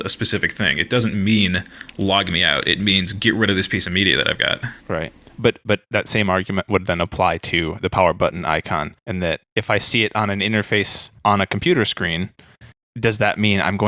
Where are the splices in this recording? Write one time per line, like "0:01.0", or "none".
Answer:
0:04.8
0:09.0
0:09.5
0:11.2
0:12.7